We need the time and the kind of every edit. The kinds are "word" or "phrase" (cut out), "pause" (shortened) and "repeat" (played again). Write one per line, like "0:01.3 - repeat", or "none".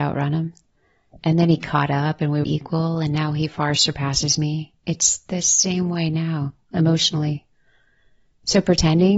0:02.4 - word